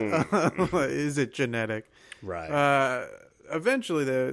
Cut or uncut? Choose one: uncut